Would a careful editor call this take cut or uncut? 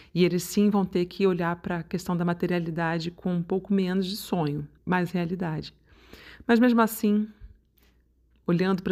cut